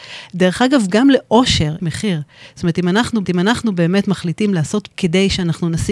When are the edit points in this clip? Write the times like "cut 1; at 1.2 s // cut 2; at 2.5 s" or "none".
cut 1; at 1.8 s // cut 2; at 3.2 s // cut 3; at 4.9 s